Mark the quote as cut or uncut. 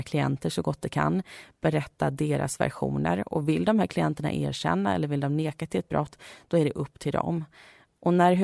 uncut